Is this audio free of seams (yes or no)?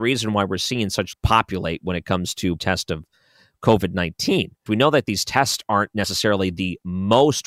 no